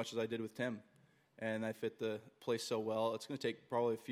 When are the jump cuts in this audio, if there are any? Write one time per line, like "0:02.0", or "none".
0:01.7